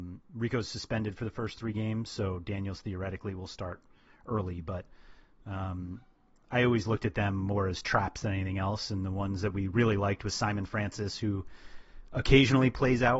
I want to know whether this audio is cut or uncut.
uncut